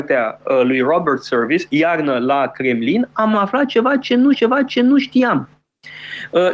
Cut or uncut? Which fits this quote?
cut